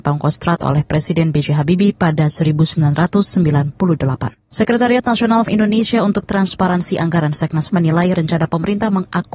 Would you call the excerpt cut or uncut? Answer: cut